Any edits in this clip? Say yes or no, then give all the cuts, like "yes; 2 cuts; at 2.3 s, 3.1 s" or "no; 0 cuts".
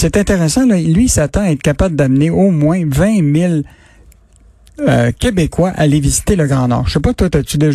no; 0 cuts